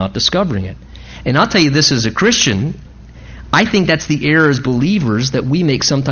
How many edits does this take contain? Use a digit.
0